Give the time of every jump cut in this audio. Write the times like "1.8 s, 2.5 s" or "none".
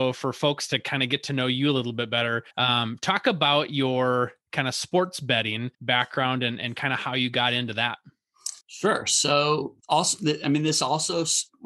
2.5 s, 5.7 s, 8.6 s, 9.8 s